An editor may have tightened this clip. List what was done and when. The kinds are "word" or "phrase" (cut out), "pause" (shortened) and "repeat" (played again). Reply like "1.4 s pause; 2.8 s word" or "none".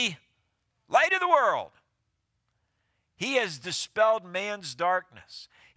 none